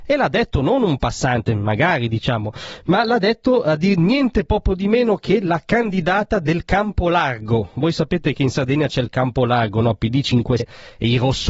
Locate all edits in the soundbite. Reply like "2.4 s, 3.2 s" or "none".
10.6 s